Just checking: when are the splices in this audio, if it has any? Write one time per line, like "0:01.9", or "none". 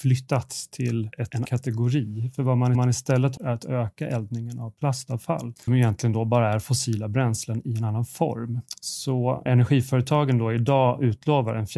0:01.4
0:02.7
0:03.4
0:05.7
0:09.5